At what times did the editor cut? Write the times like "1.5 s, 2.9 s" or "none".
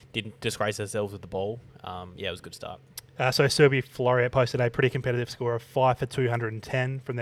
none